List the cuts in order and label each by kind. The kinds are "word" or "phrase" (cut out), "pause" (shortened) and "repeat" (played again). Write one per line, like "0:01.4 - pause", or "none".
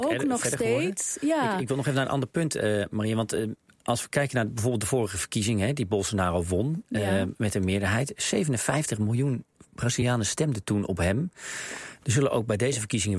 none